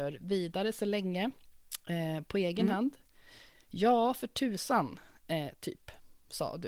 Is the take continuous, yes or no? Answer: yes